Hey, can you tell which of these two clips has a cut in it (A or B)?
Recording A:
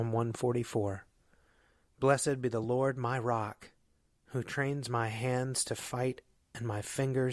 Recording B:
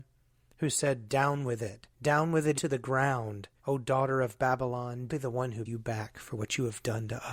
B